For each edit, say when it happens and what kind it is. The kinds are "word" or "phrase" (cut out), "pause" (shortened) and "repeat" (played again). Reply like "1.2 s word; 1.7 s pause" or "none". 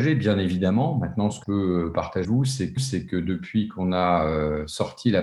1.4 s word; 2.2 s word; 2.8 s repeat

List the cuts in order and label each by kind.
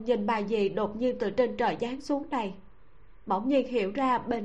none

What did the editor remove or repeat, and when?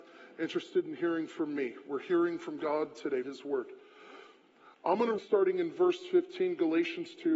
3.2 s word; 4.5 s pause; 5.2 s word

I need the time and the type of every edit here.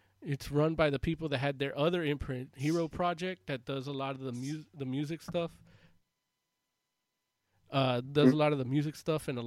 none

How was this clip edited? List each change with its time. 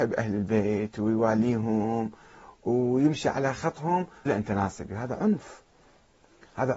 4.3 s word

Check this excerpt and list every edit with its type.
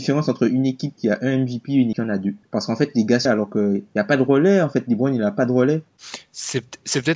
1.9 s word; 3.3 s word

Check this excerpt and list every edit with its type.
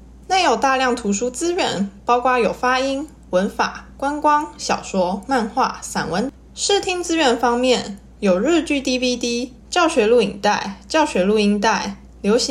9.6 s pause

